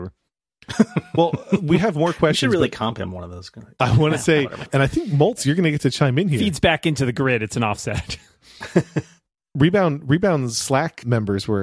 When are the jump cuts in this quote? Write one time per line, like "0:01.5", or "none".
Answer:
none